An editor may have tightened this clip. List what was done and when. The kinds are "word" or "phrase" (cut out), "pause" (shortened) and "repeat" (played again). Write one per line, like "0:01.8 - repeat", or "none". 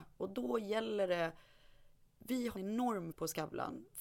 0:02.6 - word
0:03.1 - word